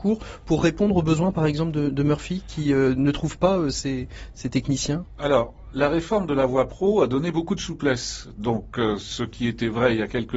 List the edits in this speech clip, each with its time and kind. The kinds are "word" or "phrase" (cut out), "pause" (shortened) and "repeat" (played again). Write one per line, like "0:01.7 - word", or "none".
none